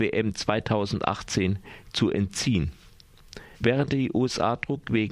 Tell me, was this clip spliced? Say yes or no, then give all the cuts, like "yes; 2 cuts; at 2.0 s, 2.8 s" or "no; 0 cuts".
yes; 1 cut; at 3.5 s